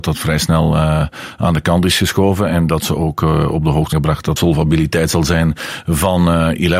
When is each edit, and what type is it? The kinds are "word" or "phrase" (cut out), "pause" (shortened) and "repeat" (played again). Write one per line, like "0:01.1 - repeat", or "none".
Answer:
0:03.9 - word
0:04.4 - word